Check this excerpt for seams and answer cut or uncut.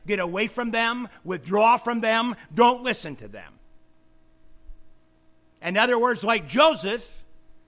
uncut